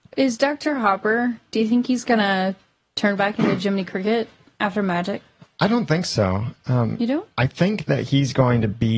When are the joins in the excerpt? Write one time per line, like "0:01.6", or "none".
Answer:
none